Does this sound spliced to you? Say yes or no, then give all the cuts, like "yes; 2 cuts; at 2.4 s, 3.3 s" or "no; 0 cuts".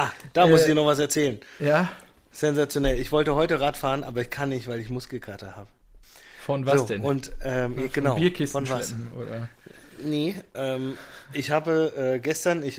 no; 0 cuts